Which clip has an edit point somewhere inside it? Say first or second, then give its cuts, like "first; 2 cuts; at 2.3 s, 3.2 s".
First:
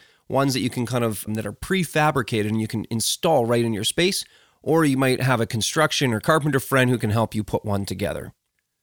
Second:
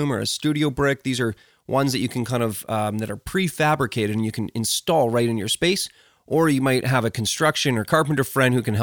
first; 1 cut; at 1.3 s